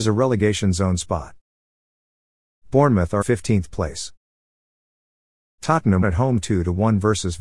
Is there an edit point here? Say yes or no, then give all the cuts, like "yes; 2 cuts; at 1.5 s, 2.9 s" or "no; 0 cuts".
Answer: yes; 2 cuts; at 3.2 s, 6.0 s